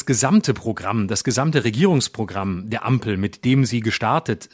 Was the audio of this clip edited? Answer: no; 0 cuts

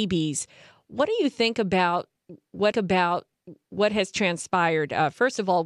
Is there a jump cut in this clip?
yes; 1 cut; at 2.7 s

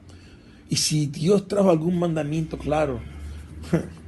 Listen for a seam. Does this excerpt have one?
no; 0 cuts

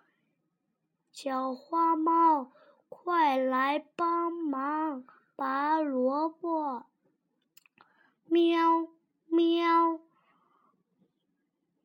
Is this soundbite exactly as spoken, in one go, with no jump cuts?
yes; 0 cuts

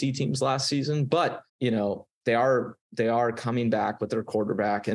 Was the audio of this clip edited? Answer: yes; 2 cuts; at 1.5 s, 2.8 s

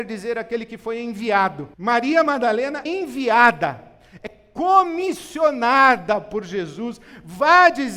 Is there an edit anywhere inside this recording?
yes; 2 cuts; at 1.7 s, 2.9 s

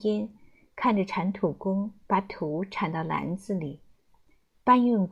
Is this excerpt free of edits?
yes; 0 cuts

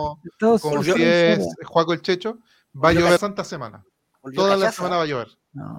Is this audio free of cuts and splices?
no; 1 cut; at 3.2 s

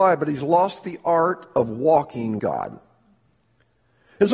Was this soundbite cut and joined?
yes; 1 cut; at 2.4 s

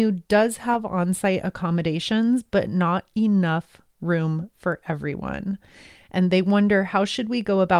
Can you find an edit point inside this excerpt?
no; 0 cuts

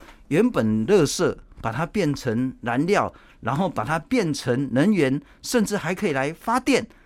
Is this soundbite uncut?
yes; 0 cuts

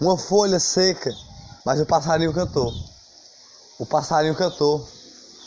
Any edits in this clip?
yes; 1 cut; at 1.6 s

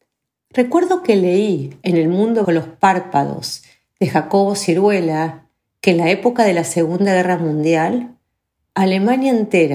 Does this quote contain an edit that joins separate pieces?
yes; 1 cut; at 2.4 s

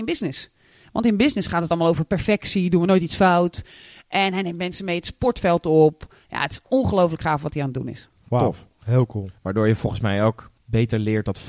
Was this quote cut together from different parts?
no; 0 cuts

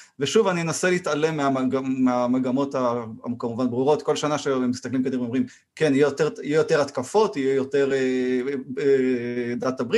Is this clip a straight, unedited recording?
yes; 0 cuts

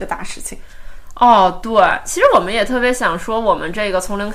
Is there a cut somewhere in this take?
no; 0 cuts

